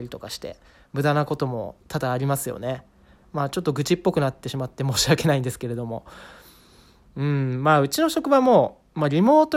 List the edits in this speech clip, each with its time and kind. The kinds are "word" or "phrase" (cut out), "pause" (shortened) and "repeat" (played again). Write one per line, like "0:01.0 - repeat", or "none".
none